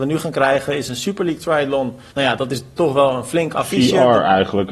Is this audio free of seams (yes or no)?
no